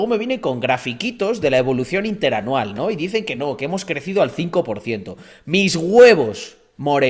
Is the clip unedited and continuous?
yes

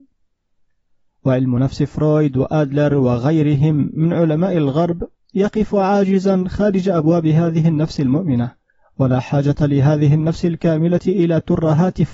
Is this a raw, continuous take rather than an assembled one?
yes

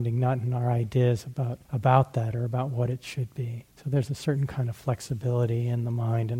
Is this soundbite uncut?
no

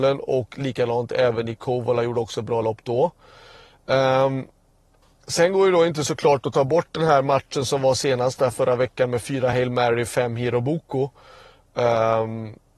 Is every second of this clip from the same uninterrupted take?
yes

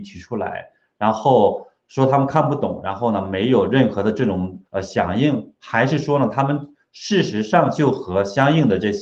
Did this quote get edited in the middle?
yes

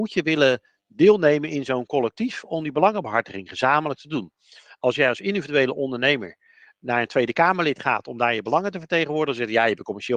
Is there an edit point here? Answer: no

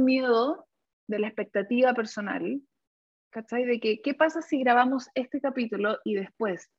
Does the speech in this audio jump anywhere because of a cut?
no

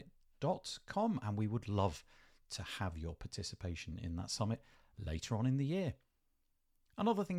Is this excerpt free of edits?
yes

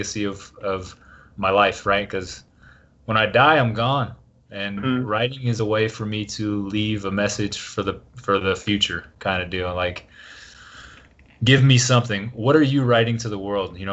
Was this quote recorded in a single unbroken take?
yes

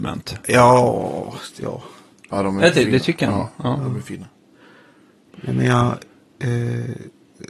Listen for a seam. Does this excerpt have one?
no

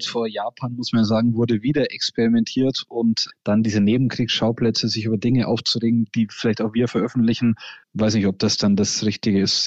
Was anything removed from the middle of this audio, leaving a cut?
yes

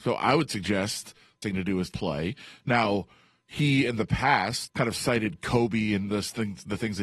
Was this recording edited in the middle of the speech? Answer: yes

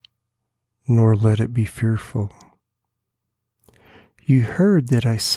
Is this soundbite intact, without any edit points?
yes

